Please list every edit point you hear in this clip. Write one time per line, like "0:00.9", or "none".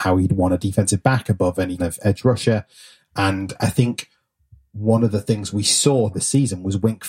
0:01.8
0:06.1